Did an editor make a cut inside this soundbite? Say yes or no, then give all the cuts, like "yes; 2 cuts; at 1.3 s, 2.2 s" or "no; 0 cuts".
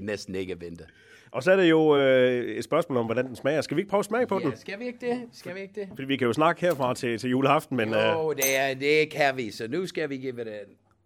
no; 0 cuts